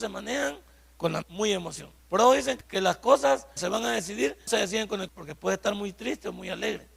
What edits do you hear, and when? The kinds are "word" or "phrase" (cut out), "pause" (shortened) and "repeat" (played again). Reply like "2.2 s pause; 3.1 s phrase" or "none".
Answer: 1.2 s phrase; 2.0 s pause; 2.6 s word; 3.6 s word; 4.5 s word; 5.1 s word